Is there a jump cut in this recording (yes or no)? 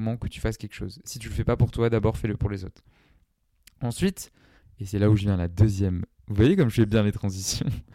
no